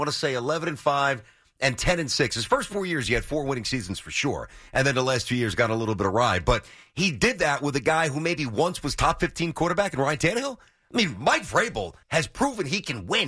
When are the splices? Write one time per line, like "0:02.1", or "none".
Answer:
0:12.0